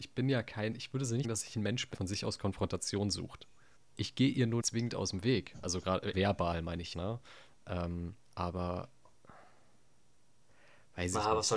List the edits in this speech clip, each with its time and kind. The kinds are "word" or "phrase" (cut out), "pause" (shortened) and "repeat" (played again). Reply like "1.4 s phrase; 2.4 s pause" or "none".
1.2 s word; 1.9 s word; 3.8 s pause; 4.6 s word; 6.1 s word; 6.9 s word; 8.2 s pause